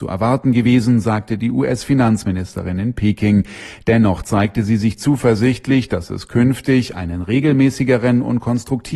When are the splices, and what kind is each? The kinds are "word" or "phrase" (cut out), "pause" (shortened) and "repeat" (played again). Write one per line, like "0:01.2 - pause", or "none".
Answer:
none

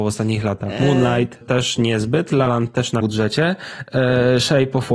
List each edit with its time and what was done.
0:01.4 - word
0:02.5 - word
0:03.0 - word

